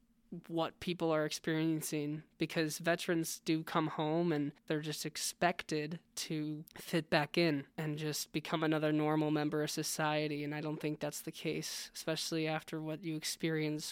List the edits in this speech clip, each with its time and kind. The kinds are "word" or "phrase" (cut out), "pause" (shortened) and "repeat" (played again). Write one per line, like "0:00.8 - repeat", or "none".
0:06.7 - pause
0:07.7 - pause

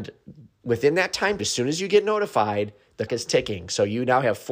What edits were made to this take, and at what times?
0:01.4 - word
0:03.1 - word

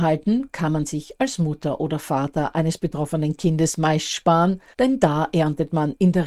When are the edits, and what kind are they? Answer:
0:04.7 - pause

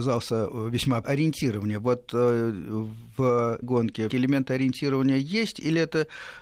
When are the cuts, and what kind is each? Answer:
0:01.0 - word
0:03.6 - word
0:04.1 - word

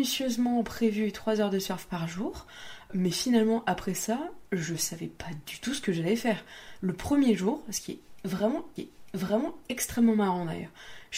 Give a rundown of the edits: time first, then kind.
0:02.9 - word
0:08.8 - repeat

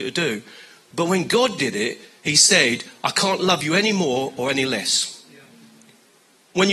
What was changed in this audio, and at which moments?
none

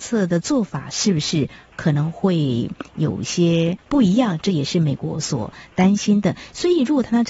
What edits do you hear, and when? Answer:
0:03.8 - pause

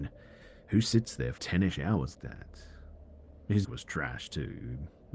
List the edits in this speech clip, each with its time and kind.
0:01.4 - word
0:02.1 - word
0:03.6 - word

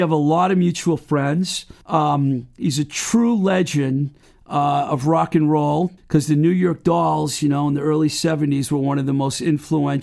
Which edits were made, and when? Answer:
0:01.8 - pause
0:04.2 - pause
0:06.0 - pause

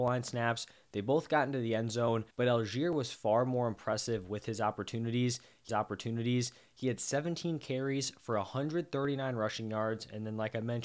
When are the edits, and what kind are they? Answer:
0:02.3 - pause
0:05.7 - repeat

